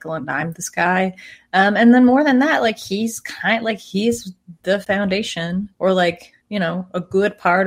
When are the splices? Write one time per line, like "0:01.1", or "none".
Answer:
0:05.7
0:06.4